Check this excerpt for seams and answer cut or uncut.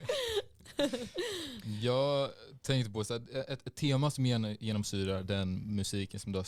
uncut